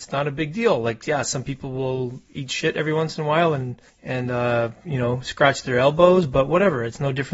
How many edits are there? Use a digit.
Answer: 1